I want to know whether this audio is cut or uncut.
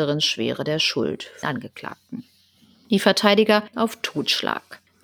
cut